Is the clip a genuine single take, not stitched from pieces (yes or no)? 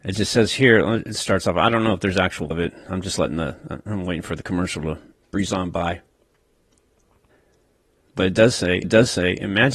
no